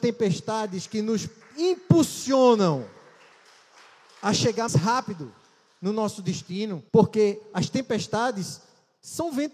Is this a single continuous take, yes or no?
no